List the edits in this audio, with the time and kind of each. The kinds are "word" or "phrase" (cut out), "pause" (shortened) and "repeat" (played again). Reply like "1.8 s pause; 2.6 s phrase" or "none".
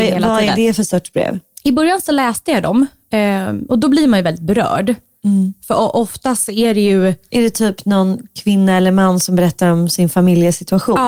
none